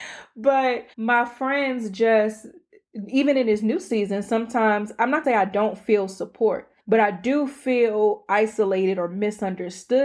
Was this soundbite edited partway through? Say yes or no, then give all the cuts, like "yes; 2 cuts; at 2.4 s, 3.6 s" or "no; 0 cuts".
yes; 3 cuts; at 0.9 s, 5.2 s, 6.8 s